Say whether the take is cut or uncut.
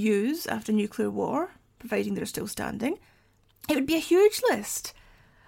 uncut